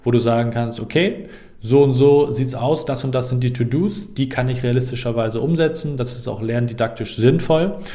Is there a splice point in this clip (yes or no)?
no